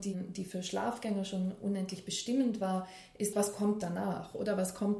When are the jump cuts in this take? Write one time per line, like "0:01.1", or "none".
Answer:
0:03.3